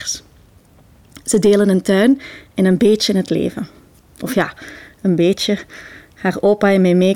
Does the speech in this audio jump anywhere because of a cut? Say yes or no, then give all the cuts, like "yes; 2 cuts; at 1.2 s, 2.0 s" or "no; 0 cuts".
no; 0 cuts